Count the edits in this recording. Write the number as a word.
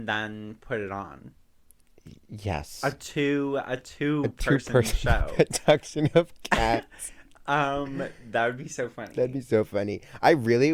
zero